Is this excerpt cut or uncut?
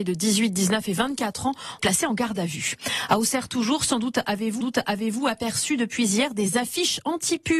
cut